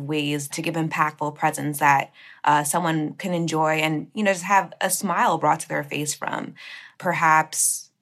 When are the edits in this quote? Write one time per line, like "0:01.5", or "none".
none